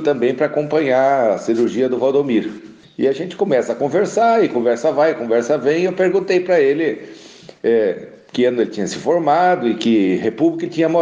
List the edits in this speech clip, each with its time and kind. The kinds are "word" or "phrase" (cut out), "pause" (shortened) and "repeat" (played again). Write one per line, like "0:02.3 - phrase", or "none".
none